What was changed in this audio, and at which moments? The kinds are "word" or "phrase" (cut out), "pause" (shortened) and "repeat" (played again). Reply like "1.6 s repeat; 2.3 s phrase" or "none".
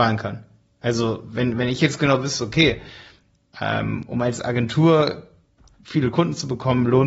none